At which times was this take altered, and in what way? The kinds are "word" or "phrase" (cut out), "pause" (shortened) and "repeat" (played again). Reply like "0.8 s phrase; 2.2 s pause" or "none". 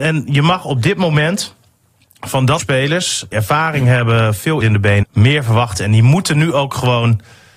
2.6 s word; 3.3 s word; 4.6 s word; 5.0 s word